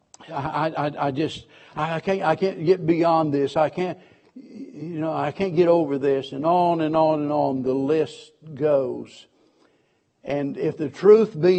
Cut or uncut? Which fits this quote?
uncut